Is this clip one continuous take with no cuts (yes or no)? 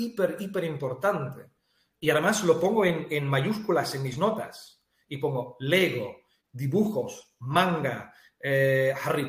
yes